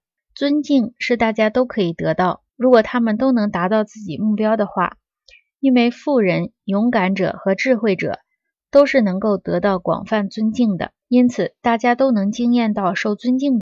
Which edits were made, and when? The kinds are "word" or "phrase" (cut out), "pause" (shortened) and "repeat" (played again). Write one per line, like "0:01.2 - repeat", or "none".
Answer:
0:02.5 - pause
0:11.0 - pause